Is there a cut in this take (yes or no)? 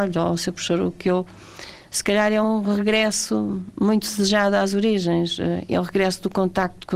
no